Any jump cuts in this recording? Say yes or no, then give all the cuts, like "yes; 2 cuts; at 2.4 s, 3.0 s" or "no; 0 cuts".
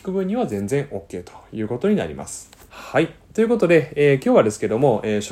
yes; 1 cut; at 2.7 s